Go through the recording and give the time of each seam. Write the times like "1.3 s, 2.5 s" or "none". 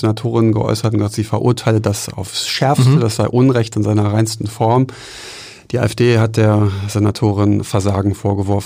none